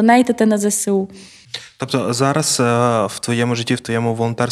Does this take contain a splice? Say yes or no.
no